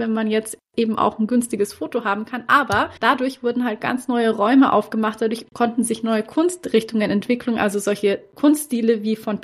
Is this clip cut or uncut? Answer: cut